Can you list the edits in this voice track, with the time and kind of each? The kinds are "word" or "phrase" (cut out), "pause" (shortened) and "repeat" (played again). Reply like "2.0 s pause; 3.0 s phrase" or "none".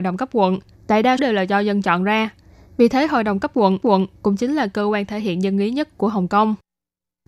1.2 s word; 3.8 s repeat